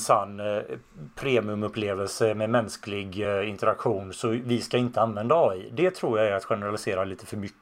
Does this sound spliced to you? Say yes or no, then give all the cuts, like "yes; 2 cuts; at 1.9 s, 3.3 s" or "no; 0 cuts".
no; 0 cuts